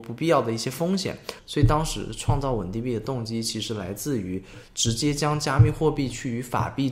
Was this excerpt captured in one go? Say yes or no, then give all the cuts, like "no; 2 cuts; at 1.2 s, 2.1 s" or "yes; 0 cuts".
yes; 0 cuts